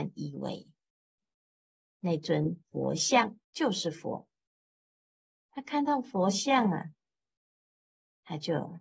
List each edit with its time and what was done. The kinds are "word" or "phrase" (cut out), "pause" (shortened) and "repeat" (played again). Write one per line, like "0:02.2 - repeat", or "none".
0:03.4 - pause